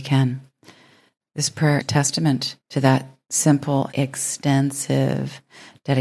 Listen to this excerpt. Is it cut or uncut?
cut